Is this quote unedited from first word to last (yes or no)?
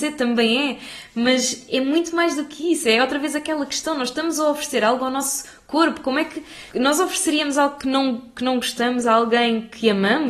no